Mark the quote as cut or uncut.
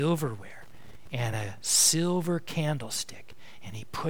uncut